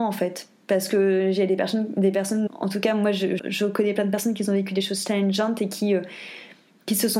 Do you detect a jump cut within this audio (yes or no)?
yes